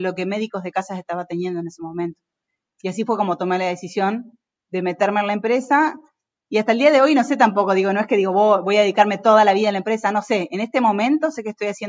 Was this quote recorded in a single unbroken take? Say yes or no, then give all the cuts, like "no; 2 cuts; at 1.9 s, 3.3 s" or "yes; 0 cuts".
yes; 0 cuts